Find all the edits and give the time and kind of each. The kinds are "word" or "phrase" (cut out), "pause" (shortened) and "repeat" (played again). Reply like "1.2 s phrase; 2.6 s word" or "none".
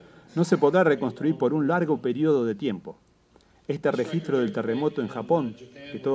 none